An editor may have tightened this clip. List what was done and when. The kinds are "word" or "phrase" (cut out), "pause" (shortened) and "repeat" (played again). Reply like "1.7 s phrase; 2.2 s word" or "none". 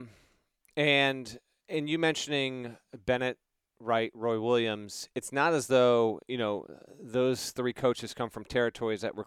none